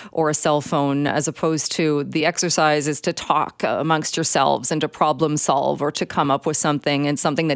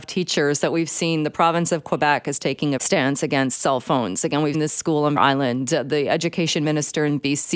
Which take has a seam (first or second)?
second